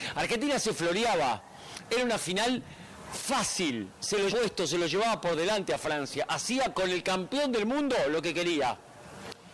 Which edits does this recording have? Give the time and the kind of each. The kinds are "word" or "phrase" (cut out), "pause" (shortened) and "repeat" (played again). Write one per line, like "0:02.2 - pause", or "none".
0:04.3 - word